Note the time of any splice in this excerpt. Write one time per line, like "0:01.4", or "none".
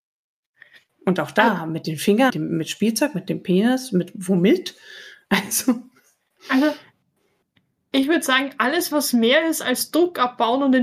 0:02.3